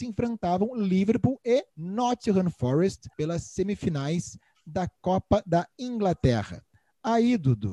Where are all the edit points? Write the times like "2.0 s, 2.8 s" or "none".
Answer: 1.7 s, 3.1 s